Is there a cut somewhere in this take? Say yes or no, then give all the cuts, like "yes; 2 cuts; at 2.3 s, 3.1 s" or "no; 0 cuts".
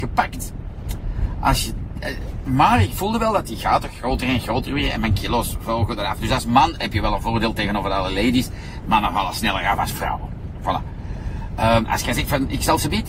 no; 0 cuts